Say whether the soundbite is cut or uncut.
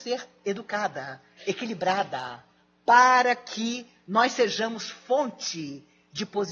uncut